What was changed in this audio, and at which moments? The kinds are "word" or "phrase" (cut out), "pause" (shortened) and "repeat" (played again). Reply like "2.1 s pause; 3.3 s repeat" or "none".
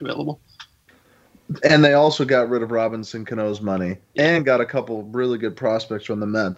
4.0 s pause